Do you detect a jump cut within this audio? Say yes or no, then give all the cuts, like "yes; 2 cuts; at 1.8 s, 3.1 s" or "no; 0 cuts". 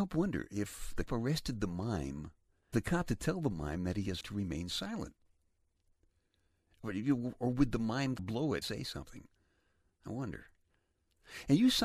yes; 6 cuts; at 1.1 s, 2.7 s, 3.1 s, 4.2 s, 8.2 s, 8.6 s